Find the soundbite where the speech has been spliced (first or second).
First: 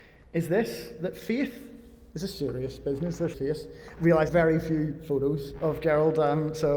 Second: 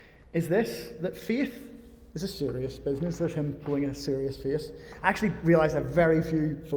first